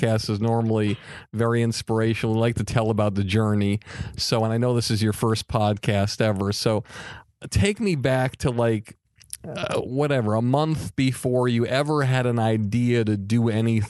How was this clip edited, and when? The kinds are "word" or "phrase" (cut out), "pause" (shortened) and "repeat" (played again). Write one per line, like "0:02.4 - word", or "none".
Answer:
none